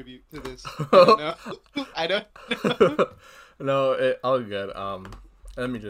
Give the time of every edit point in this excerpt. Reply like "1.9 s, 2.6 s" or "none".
none

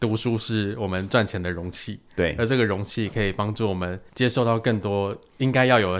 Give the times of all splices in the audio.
4.1 s

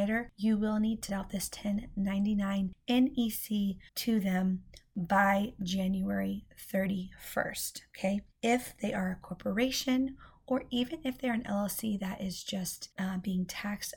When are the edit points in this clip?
1.1 s, 3.9 s, 12.9 s

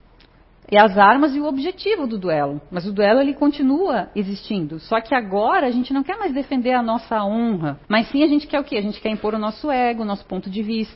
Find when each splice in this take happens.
7.8 s

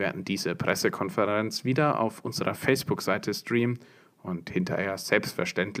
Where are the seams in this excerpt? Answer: none

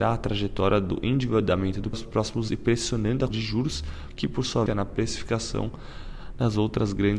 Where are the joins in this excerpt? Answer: 1.9 s, 2.5 s, 3.3 s, 4.7 s

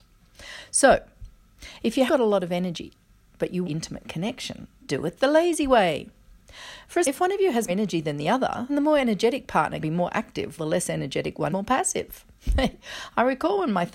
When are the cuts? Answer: 2.1 s, 3.6 s, 4.8 s, 7.0 s, 7.7 s, 8.7 s, 9.8 s, 10.6 s, 11.5 s

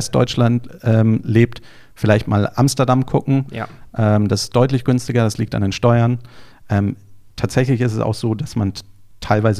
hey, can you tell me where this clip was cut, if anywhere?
none

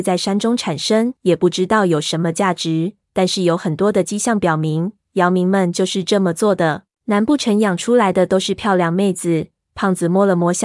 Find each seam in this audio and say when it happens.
1.2 s, 6.9 s

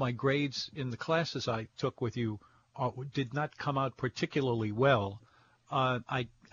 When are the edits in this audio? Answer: none

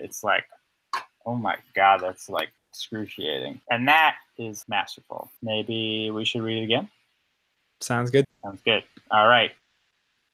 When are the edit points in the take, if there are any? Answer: 3.6 s, 5.4 s, 8.2 s

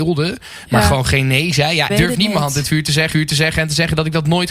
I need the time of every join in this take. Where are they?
1.9 s, 3.1 s

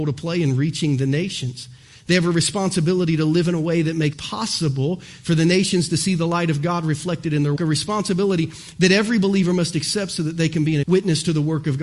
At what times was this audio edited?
4.1 s, 7.6 s, 10.8 s

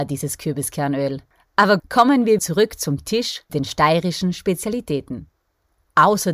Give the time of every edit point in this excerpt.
1.8 s, 2.4 s, 3.5 s

